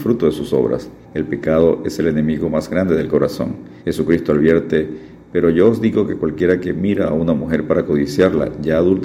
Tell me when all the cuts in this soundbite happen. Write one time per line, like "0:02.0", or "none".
0:01.0
0:03.8